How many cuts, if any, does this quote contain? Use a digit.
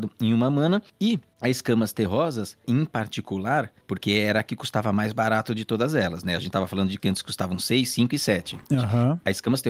1